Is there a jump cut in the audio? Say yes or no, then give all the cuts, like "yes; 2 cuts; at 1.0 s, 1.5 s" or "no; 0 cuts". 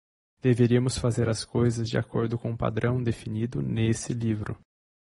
no; 0 cuts